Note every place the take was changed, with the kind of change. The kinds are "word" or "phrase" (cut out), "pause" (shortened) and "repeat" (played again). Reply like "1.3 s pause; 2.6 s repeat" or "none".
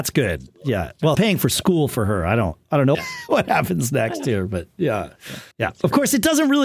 1.1 s word; 2.9 s word; 5.5 s pause